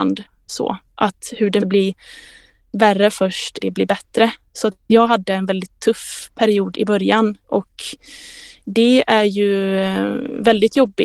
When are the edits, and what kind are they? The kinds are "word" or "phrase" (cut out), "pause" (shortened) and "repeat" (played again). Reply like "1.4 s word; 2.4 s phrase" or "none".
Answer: 1.6 s word; 3.6 s word